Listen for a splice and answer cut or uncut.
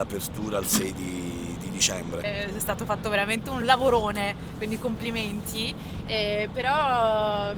uncut